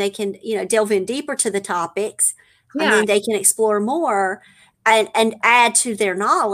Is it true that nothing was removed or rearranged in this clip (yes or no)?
yes